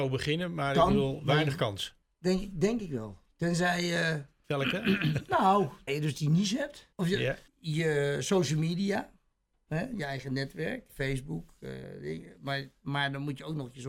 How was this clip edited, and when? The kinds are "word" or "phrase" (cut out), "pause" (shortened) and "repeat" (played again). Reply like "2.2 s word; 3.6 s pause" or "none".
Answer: 2.0 s pause; 4.4 s word; 5.9 s word; 6.9 s pause; 7.5 s pause; 10.9 s word